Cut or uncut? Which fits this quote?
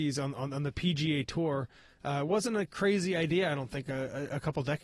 uncut